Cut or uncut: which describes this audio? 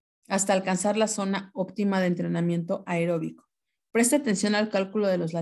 uncut